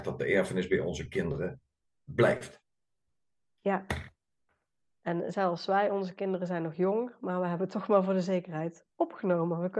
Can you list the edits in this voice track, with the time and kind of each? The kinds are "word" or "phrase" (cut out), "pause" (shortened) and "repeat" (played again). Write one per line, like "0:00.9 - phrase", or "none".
none